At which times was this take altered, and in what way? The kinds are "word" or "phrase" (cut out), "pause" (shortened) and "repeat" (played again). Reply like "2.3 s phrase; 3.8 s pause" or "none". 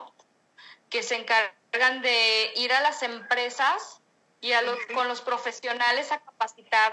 none